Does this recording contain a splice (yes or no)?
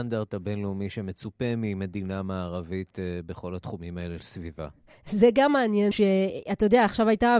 yes